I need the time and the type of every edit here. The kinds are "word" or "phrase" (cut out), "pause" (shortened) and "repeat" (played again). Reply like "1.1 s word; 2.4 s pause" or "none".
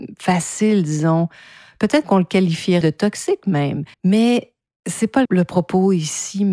2.0 s word; 2.8 s word; 3.9 s pause; 5.3 s word

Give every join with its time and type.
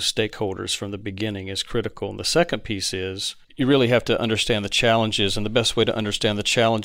3.4 s pause

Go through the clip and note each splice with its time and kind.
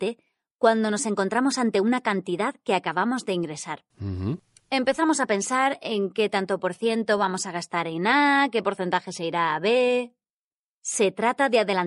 none

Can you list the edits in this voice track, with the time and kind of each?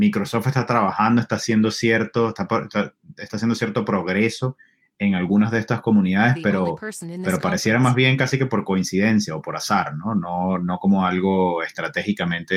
none

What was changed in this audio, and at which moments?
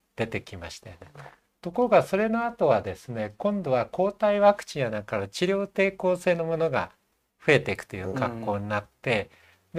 none

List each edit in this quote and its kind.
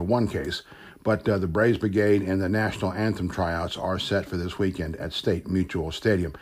none

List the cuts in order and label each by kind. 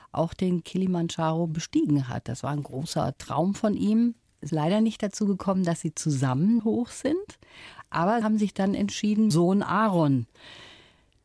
4.5 s word; 6.6 s word; 8.2 s word; 9.3 s phrase

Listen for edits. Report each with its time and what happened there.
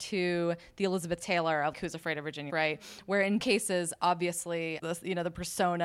1.7 s word; 2.5 s word; 3.4 s word; 4.8 s phrase

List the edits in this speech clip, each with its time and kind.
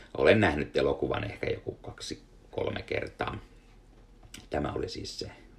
2.5 s word

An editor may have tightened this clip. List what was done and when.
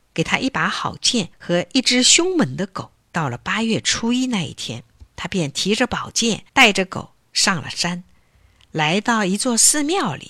1.3 s pause; 3.0 s pause; 5.1 s pause; 6.5 s pause

